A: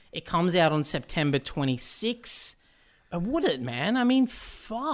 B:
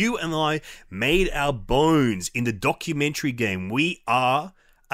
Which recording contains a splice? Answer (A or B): A